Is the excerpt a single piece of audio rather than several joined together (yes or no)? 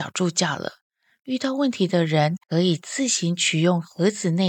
no